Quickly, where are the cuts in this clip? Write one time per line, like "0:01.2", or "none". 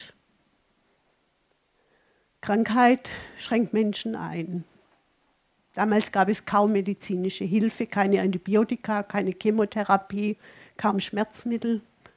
none

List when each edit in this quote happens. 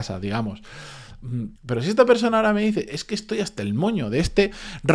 0:01.6

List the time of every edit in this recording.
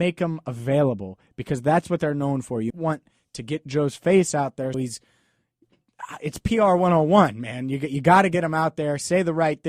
0:02.7
0:04.7

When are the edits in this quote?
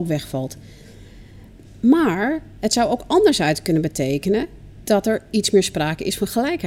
none

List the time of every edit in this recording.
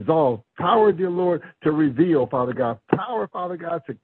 none

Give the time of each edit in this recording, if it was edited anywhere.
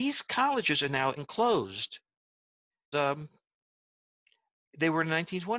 0:01.2
0:02.9

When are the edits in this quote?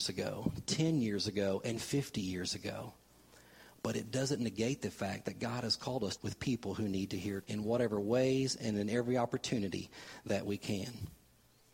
0:06.2
0:07.4

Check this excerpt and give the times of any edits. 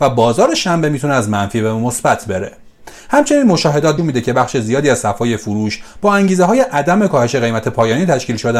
0:04.0

